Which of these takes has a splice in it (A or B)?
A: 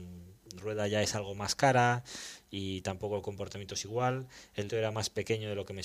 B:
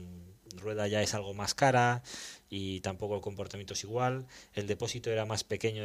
A